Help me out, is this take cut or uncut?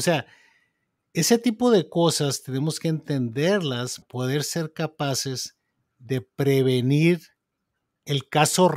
cut